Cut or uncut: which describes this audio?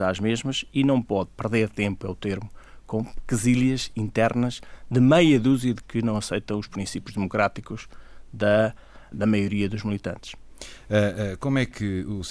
cut